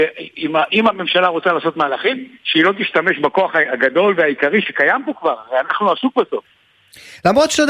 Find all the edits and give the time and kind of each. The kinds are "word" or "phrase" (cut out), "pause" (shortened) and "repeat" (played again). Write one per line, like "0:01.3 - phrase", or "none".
none